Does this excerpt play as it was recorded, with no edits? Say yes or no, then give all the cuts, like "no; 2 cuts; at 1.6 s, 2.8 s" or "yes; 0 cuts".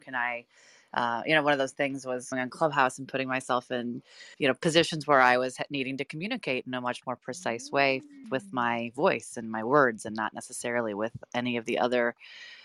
no; 3 cuts; at 2.3 s, 4.3 s, 8.2 s